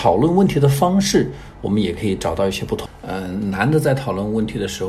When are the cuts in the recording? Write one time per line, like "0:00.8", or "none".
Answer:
none